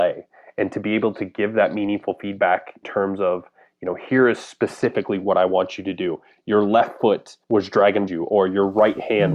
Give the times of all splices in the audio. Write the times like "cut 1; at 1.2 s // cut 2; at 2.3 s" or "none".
cut 1; at 2.8 s // cut 2; at 7.4 s // cut 3; at 8.1 s